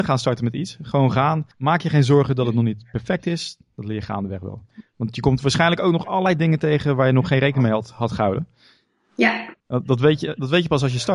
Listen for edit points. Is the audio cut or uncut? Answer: cut